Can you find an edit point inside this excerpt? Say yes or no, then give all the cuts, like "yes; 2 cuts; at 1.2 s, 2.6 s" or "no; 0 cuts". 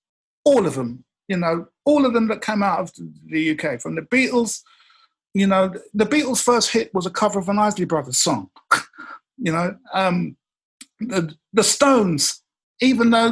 no; 0 cuts